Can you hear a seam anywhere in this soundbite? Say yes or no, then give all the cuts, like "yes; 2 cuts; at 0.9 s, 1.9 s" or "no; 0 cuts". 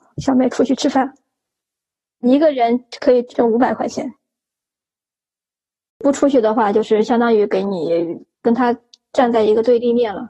yes; 1 cut; at 8.3 s